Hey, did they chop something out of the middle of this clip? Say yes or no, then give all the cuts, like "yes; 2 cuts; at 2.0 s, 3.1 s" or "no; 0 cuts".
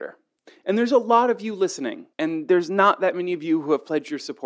yes; 1 cut; at 2.1 s